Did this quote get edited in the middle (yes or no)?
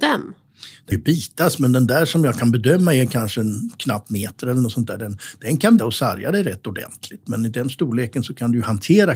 yes